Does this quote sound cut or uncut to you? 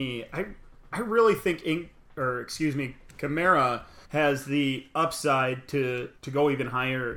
cut